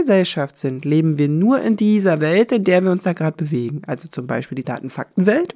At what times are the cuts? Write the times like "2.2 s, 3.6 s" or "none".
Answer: 4.6 s